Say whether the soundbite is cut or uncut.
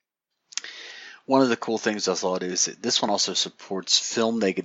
uncut